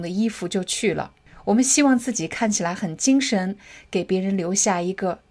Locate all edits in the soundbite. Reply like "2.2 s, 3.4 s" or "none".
none